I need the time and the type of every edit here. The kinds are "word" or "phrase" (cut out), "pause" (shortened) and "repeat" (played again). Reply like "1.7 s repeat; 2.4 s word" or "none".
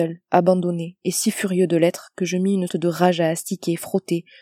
2.7 s word